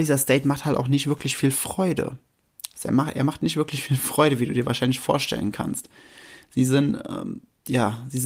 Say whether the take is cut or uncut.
uncut